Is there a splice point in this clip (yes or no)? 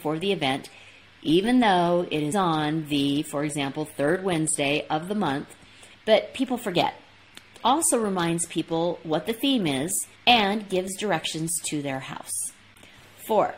yes